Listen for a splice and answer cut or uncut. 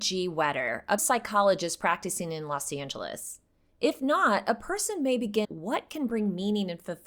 cut